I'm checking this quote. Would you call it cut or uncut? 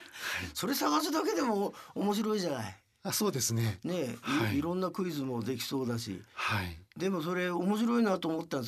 uncut